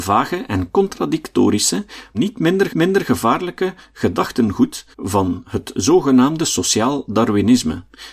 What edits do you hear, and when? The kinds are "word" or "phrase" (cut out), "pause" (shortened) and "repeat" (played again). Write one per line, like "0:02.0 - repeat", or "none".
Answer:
0:02.1 - phrase
0:02.7 - repeat
0:04.9 - pause

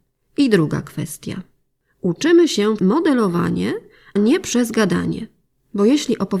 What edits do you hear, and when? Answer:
0:02.8 - word
0:04.2 - word

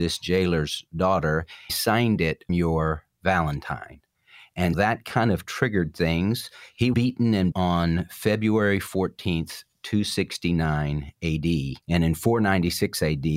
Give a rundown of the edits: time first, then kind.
0:01.7 - phrase
0:02.5 - word
0:04.7 - word
0:06.9 - word
0:07.5 - word
0:11.8 - pause

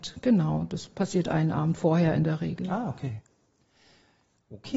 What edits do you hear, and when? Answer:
none

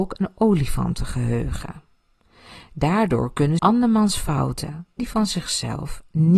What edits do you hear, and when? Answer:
0:03.6 - word
0:05.0 - word

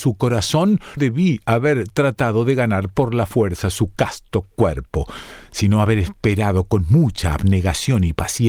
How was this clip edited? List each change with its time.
0:01.0 - word

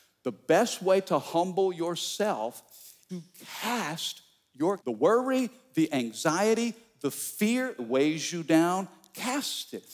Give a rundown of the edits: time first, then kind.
0:03.1 - word
0:04.8 - word
0:07.8 - word

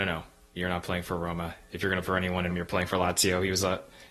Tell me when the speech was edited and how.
0:02.0 - phrase
0:02.5 - word

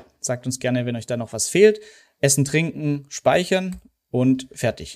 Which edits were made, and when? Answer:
none

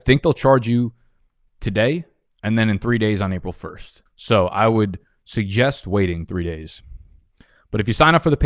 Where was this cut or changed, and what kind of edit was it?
0:04.1 - pause

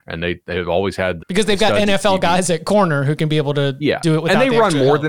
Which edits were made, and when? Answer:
0:01.2 - word

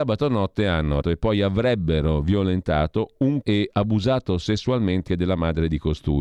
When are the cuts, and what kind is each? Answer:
0:01.0 - word
0:03.4 - word
0:05.1 - word

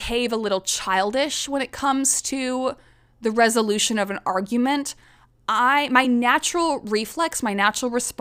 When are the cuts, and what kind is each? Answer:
none

